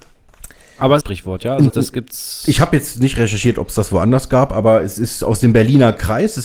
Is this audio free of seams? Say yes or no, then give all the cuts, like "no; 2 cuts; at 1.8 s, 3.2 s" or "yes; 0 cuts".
no; 2 cuts; at 1.0 s, 1.7 s